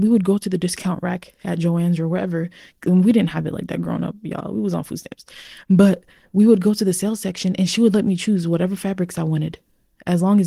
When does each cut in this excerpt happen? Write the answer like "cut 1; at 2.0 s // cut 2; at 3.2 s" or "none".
none